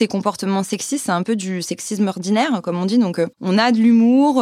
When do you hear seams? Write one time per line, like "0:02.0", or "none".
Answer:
0:03.3